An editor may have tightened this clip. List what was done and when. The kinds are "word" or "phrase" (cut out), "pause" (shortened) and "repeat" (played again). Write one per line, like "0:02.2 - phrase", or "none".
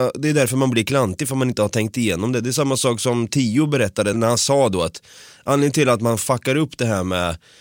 0:04.1 - word